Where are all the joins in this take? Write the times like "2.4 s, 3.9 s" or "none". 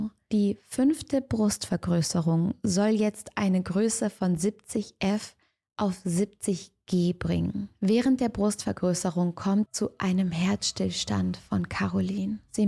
9.7 s

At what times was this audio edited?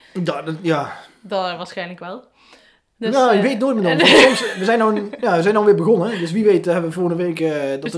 none

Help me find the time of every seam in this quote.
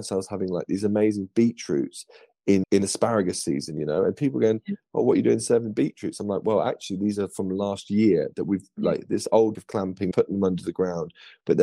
2.6 s, 9.5 s, 10.1 s

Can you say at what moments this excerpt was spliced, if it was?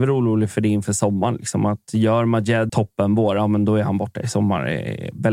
2.7 s

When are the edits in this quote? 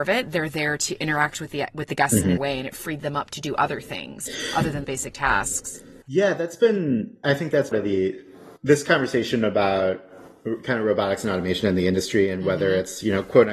2.4 s, 4.8 s, 6.0 s, 7.2 s, 7.7 s, 8.6 s

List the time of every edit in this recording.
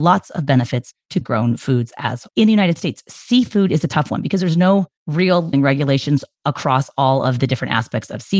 1.2 s, 2.3 s, 5.5 s

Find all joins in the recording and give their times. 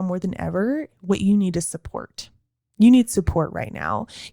none

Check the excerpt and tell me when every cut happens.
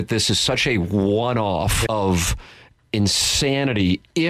1.9 s

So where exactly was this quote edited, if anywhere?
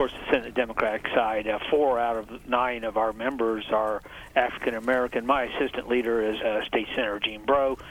6.4 s

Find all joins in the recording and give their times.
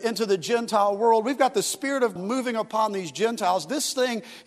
2.2 s

